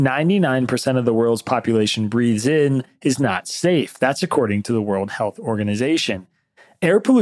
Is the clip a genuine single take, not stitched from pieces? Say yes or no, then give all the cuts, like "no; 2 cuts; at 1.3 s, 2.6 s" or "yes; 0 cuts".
yes; 0 cuts